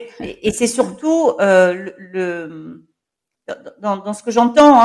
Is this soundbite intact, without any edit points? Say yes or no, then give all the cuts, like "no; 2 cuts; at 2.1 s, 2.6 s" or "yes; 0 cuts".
yes; 0 cuts